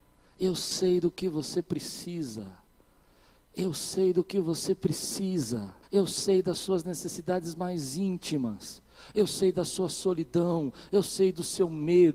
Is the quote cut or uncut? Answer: cut